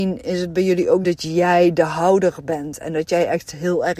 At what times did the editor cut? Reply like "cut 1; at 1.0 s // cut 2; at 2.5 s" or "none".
cut 1; at 1.0 s